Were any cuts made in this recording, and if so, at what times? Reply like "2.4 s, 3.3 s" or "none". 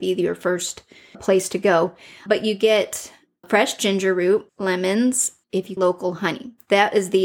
1.1 s, 2.3 s, 3.4 s, 4.5 s, 5.4 s, 5.8 s